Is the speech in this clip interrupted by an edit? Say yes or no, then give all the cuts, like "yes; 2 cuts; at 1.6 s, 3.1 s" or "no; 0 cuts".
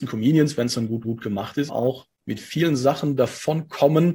yes; 3 cuts; at 1.0 s, 1.7 s, 2.2 s